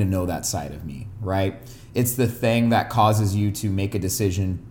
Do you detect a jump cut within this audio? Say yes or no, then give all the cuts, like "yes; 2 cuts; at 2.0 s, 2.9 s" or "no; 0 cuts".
no; 0 cuts